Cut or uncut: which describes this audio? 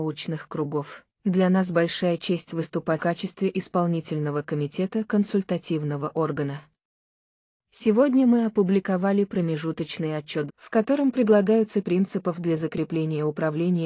cut